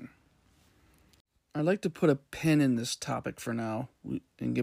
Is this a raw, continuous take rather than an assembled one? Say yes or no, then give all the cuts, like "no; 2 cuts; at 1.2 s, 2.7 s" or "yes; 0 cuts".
yes; 0 cuts